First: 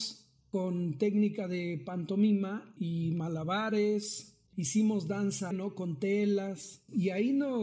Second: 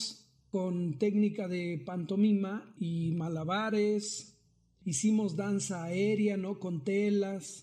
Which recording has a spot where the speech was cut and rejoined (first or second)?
first